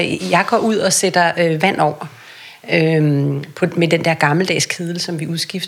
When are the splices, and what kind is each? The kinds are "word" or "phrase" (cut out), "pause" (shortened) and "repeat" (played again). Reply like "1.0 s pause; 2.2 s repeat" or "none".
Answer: none